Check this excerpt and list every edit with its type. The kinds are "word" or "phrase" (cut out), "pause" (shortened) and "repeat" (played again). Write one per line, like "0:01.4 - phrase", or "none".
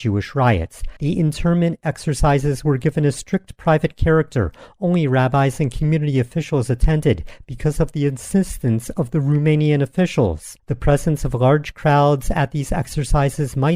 0:01.0 - pause
0:10.6 - pause